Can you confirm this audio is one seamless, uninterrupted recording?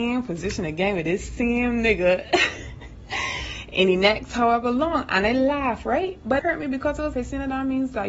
no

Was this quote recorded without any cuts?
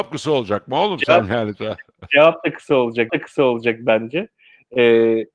no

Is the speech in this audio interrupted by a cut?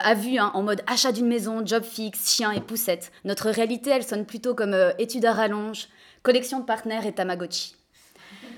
yes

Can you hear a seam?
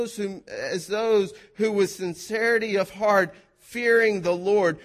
no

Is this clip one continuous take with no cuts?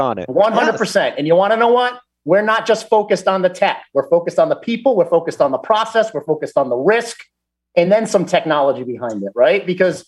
yes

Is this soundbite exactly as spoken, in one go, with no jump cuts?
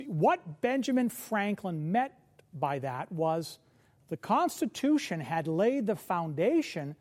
yes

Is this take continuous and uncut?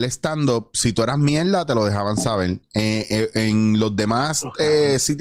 yes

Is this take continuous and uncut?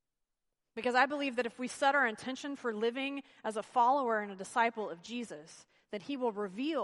yes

